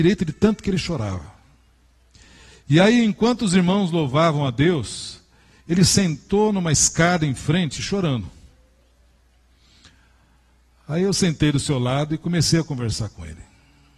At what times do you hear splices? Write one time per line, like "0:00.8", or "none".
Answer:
none

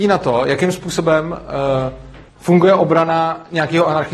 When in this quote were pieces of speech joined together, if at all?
0:02.3

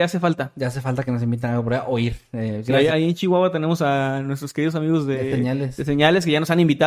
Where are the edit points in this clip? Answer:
0:02.9

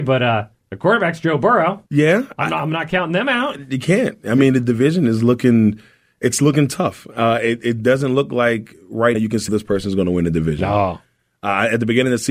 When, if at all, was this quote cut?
0:01.9
0:09.1
0:09.5

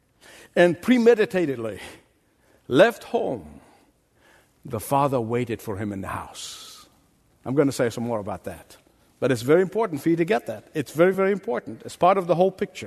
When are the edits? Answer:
none

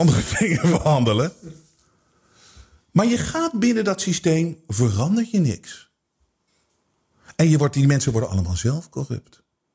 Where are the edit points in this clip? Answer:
none

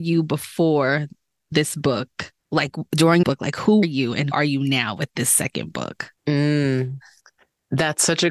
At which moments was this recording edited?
0:02.4
0:03.2
0:03.8
0:04.3
0:06.2

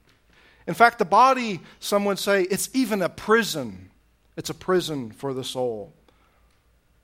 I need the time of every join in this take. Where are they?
none

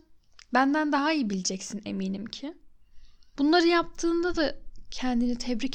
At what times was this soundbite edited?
none

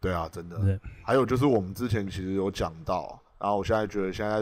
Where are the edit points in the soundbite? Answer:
0:03.3

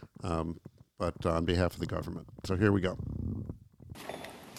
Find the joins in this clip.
none

